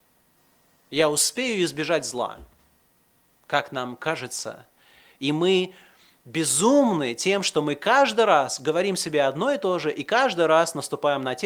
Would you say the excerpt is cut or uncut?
uncut